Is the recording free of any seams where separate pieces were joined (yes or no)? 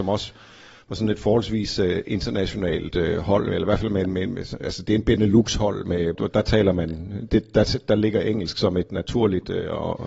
no